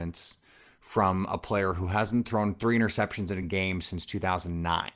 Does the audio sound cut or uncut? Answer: uncut